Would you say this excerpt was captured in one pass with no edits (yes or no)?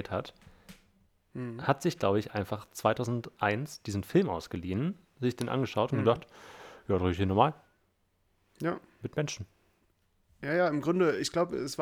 yes